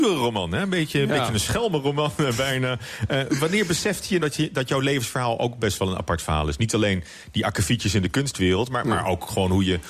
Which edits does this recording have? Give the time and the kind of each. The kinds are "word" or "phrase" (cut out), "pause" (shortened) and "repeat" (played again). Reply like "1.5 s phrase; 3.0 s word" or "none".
4.2 s word